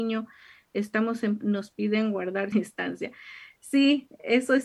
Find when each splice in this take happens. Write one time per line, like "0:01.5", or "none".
0:01.4
0:02.5

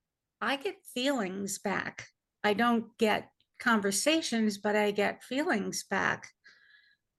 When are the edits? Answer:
none

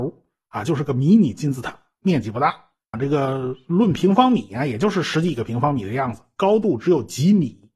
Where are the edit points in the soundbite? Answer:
0:02.9

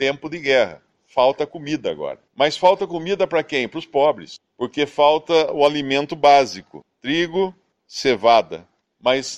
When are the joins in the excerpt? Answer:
0:02.3

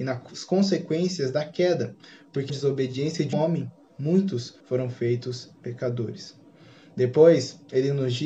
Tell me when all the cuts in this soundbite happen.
0:02.5
0:03.3
0:04.6
0:05.6

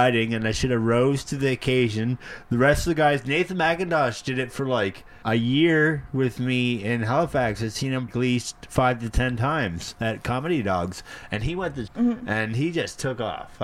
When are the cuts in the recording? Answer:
0:05.2
0:08.1
0:11.9

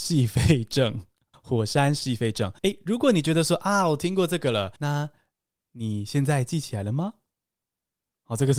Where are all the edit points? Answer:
0:01.3
0:02.6
0:04.8

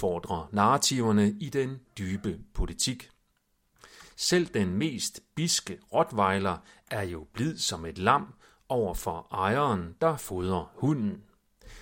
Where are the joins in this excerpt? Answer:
none

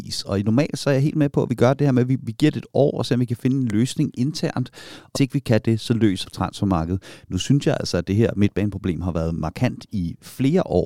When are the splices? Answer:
0:05.1
0:06.2

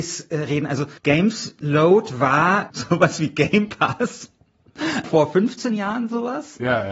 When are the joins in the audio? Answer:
0:01.0
0:02.7
0:05.0

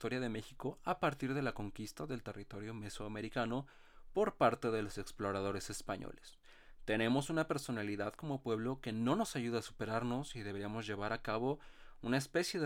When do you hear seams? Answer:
none

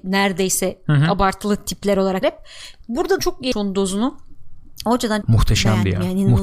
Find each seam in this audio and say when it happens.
0:02.2
0:03.2
0:03.5
0:05.2

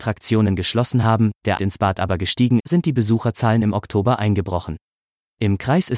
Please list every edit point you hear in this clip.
0:01.6
0:02.6

